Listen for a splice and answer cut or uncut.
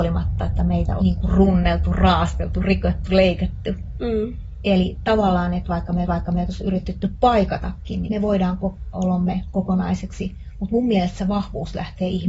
cut